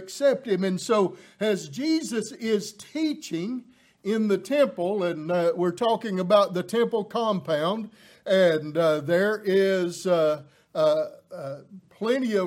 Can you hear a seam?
no; 0 cuts

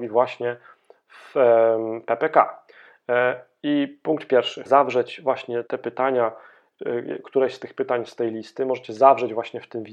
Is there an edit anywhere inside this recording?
yes; 2 cuts; at 4.7 s, 5.7 s

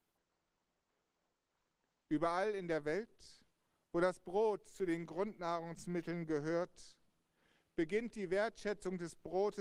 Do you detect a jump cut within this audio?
no; 0 cuts

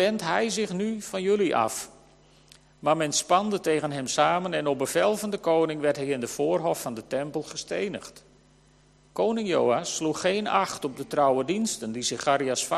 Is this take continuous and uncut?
yes; 0 cuts

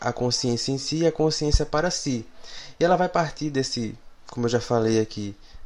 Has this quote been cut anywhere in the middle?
no; 0 cuts

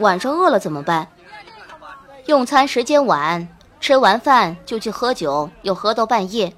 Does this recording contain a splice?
no; 0 cuts

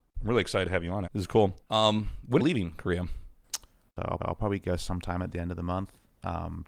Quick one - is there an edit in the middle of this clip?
yes; 4 cuts; at 1.1 s, 1.6 s, 2.4 s, 4.2 s

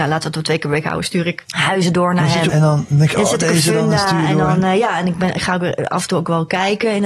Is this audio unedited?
no; 1 cut; at 2.5 s

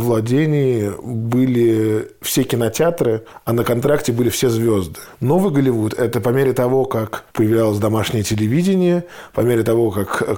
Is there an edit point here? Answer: no; 0 cuts

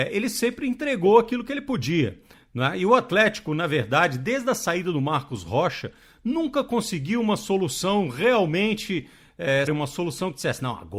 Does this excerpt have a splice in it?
yes; 1 cut; at 9.7 s

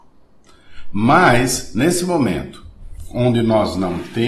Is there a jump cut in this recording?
no; 0 cuts

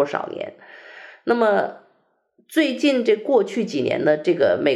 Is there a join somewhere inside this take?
no; 0 cuts

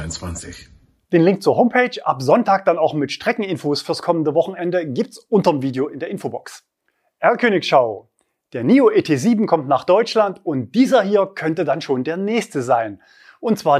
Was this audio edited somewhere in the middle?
no; 0 cuts

